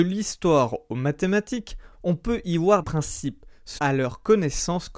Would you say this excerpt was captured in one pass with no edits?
no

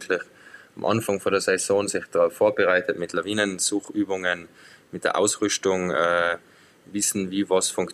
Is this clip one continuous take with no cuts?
yes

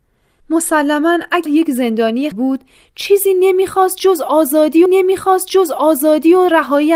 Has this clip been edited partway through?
yes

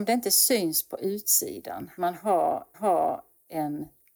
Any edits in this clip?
yes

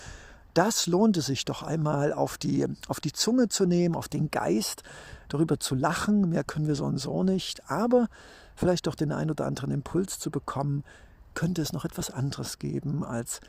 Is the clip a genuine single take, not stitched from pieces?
yes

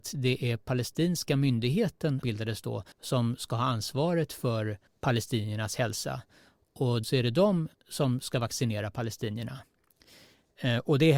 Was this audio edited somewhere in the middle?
yes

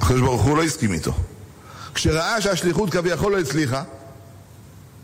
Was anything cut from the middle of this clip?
no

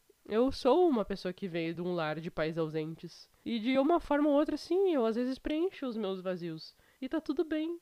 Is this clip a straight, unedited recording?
yes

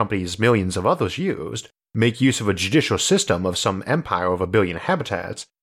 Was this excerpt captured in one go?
yes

